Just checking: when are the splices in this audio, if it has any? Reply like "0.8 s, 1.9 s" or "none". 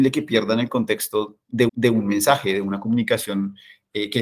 1.7 s